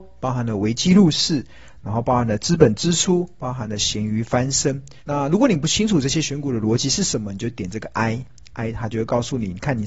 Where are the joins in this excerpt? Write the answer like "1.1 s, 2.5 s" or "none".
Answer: 5.0 s